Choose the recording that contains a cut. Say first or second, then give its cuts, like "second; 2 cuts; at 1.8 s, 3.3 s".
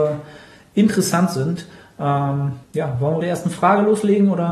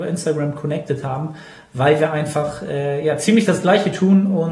first; 2 cuts; at 2.6 s, 3.2 s